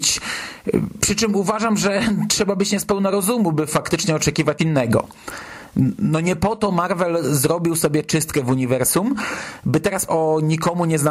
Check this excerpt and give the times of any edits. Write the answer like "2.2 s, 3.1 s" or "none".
4.6 s, 10.1 s